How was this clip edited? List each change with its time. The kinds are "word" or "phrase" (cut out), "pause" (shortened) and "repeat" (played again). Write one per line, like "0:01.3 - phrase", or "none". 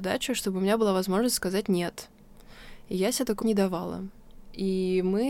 0:03.4 - word